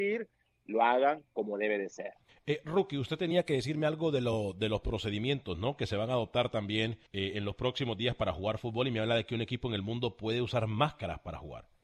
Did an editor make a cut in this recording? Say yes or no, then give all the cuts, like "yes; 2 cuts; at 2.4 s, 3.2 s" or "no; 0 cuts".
yes; 2 cuts; at 2.3 s, 7.1 s